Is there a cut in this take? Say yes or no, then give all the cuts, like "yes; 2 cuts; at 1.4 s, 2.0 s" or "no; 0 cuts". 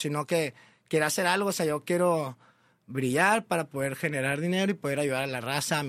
no; 0 cuts